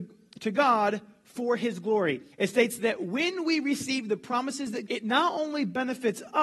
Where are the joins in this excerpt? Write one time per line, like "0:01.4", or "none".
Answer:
0:02.3
0:04.9